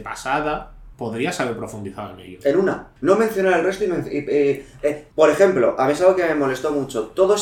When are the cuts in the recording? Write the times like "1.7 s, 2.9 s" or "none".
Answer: 0.9 s, 3.0 s, 5.1 s